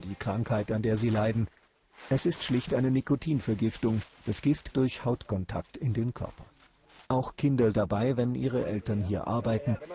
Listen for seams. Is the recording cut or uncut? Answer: cut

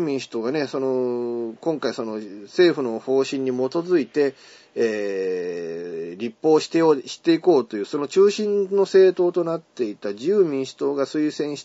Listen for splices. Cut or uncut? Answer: uncut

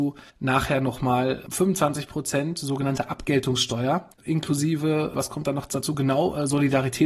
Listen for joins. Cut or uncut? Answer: uncut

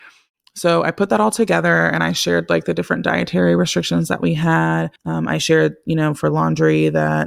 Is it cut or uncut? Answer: cut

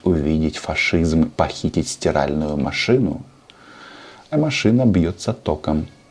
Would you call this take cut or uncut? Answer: cut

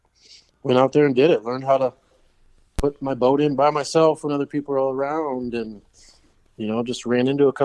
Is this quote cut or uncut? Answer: uncut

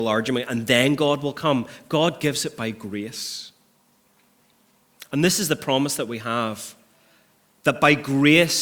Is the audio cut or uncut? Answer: uncut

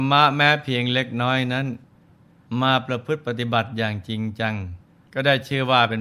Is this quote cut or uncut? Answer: cut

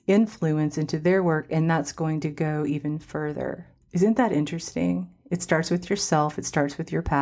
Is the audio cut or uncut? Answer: cut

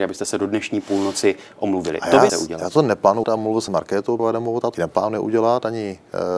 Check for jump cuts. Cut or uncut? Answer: cut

